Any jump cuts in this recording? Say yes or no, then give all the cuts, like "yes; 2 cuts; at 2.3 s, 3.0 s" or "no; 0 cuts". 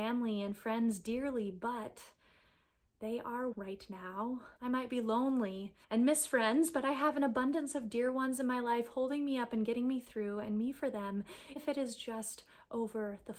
yes; 4 cuts; at 3.5 s, 4.6 s, 5.8 s, 11.6 s